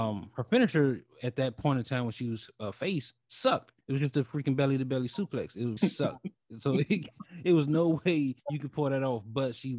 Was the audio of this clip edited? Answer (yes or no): yes